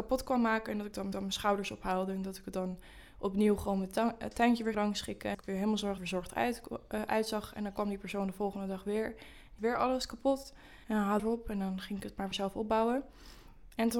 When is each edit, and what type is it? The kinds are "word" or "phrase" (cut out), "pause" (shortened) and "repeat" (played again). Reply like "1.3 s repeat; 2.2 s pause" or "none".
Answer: 1.1 s repeat; 4.7 s word; 5.3 s word; 6.0 s phrase; 9.6 s word; 10.8 s pause; 11.2 s phrase; 12.3 s phrase